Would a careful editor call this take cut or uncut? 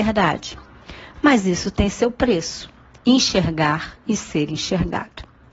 uncut